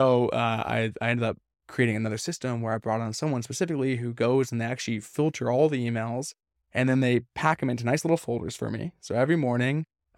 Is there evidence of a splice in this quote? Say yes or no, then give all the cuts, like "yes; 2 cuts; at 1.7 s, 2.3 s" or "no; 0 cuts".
no; 0 cuts